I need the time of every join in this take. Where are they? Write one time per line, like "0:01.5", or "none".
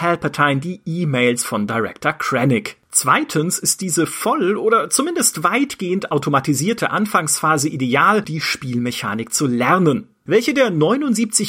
0:08.2